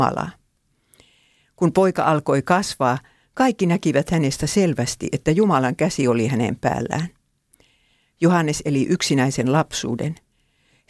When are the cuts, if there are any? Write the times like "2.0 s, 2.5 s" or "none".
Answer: none